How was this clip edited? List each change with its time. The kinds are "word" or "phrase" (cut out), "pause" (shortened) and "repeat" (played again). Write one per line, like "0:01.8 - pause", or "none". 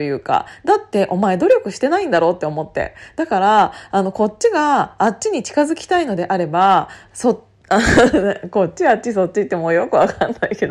none

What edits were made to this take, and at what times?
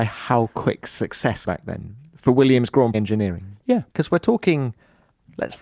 0:01.5 - word
0:02.9 - word
0:03.9 - pause

